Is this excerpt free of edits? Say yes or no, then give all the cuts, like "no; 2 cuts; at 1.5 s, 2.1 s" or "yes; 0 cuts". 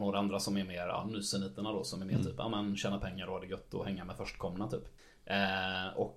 yes; 0 cuts